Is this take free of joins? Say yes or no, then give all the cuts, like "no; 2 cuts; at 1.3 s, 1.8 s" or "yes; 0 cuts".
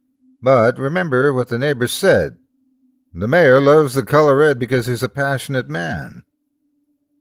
yes; 0 cuts